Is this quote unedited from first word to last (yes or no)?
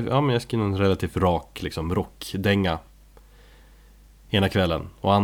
yes